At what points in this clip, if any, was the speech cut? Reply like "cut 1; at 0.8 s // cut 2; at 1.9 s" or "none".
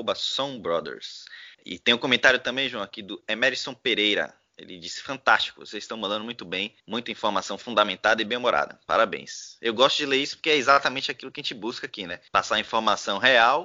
cut 1; at 1.5 s // cut 2; at 6.8 s // cut 3; at 12.3 s